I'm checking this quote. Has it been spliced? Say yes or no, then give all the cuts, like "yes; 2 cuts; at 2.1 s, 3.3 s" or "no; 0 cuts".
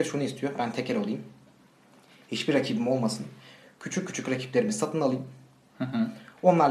no; 0 cuts